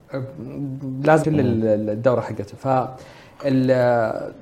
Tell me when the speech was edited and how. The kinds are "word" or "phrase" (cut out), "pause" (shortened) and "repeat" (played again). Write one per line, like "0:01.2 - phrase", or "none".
0:01.2 - word